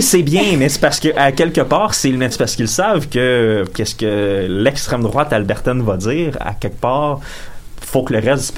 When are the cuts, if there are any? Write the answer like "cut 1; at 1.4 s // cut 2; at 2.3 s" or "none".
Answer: cut 1; at 2.3 s // cut 2; at 3.7 s